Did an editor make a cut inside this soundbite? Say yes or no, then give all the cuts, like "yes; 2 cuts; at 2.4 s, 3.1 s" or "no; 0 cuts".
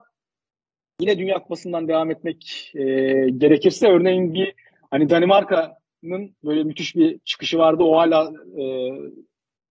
no; 0 cuts